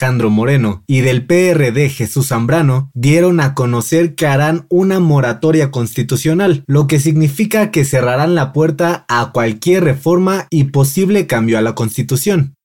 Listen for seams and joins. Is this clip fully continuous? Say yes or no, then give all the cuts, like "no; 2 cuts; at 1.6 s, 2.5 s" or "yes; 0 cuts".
yes; 0 cuts